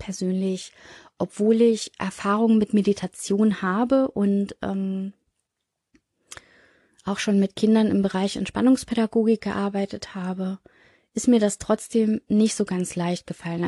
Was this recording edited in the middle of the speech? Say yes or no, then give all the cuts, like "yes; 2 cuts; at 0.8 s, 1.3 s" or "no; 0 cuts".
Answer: no; 0 cuts